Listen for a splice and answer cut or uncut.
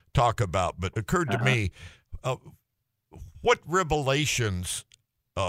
cut